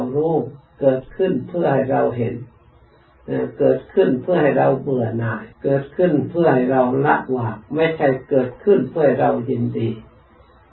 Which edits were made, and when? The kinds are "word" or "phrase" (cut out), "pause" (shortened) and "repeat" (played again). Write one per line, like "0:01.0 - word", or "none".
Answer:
0:05.5 - pause
0:07.6 - pause